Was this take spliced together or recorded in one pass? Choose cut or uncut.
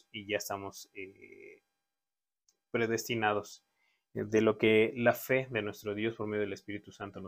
uncut